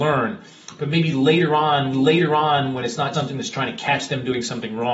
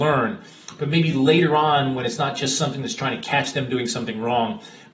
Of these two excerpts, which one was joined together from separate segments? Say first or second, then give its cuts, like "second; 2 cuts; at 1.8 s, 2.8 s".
first; 2 cuts; at 1.9 s, 3.1 s